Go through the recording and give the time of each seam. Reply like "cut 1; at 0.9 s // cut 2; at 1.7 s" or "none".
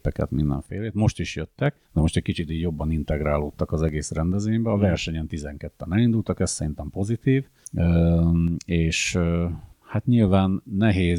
cut 1; at 1.8 s // cut 2; at 9.7 s